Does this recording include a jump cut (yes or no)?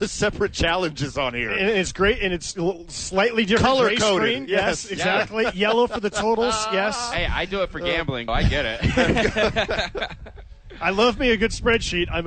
yes